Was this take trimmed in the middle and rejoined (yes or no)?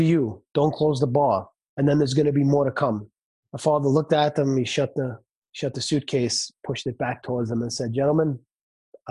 yes